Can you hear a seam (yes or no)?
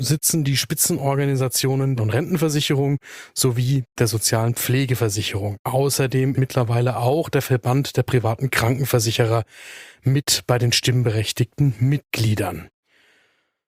yes